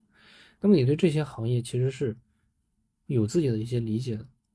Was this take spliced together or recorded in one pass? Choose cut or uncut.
uncut